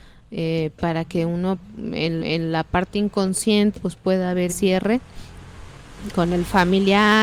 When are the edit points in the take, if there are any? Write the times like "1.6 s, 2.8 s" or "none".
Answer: 2.2 s, 3.7 s, 4.5 s